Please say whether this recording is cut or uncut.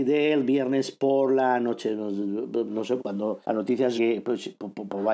cut